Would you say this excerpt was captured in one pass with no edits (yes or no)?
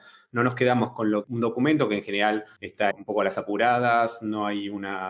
no